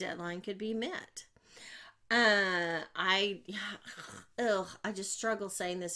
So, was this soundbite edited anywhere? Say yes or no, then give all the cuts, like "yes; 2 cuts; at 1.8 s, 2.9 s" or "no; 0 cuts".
no; 0 cuts